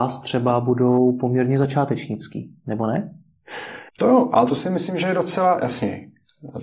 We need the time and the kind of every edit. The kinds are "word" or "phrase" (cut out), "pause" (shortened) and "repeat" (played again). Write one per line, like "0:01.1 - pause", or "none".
0:03.9 - pause